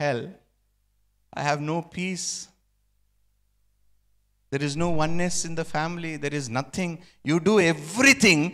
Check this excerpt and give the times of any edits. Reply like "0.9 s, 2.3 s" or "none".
none